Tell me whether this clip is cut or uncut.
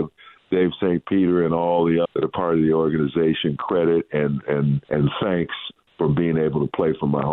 cut